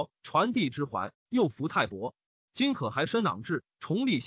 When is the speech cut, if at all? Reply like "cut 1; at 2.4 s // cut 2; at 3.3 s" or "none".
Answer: none

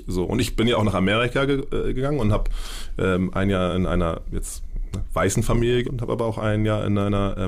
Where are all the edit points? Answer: cut 1; at 5.8 s

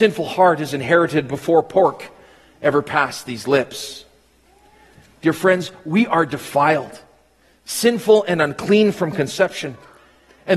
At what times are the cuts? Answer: none

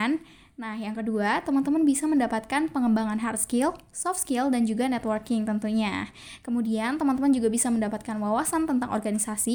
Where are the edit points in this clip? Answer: none

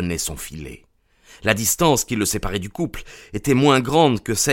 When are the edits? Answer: none

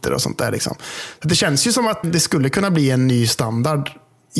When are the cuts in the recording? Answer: cut 1; at 2.0 s

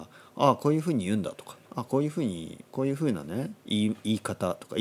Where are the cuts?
cut 1; at 1.6 s // cut 2; at 3.6 s

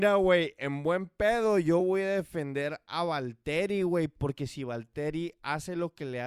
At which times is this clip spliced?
none

